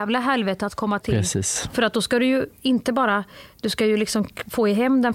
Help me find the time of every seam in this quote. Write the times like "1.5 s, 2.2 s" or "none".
1.0 s